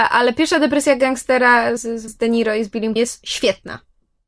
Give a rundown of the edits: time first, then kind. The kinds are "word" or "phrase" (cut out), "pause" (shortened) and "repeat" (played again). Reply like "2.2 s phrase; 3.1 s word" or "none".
1.8 s word; 2.1 s word; 3.0 s word